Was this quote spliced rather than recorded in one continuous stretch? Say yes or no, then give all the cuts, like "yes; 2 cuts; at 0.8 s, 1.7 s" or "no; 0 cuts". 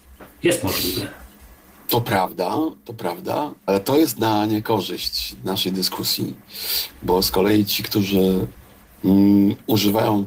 no; 0 cuts